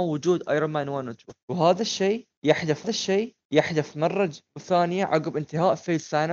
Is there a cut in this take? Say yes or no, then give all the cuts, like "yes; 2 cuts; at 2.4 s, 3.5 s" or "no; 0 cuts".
yes; 1 cut; at 2.8 s